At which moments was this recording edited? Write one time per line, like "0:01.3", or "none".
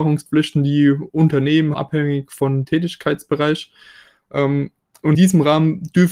0:01.7
0:02.6
0:05.1

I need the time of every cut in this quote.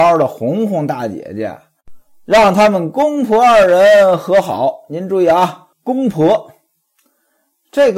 0:05.7

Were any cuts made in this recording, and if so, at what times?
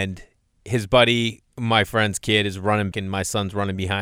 0:01.5
0:02.9

